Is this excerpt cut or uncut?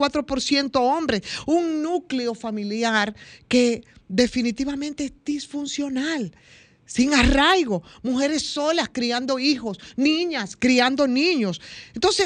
uncut